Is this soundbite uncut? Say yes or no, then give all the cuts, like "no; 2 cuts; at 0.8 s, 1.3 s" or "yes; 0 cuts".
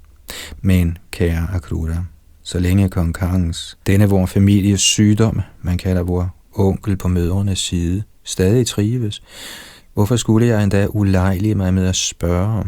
no; 2 cuts; at 3.8 s, 9.8 s